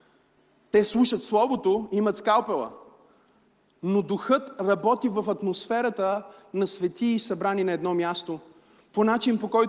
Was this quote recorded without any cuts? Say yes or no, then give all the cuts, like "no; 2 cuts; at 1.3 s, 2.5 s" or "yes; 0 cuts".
yes; 0 cuts